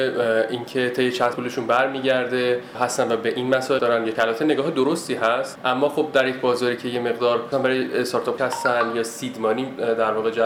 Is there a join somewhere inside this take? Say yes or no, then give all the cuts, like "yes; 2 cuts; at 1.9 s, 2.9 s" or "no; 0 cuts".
yes; 5 cuts; at 1.3 s, 3.8 s, 4.1 s, 7.5 s, 8.4 s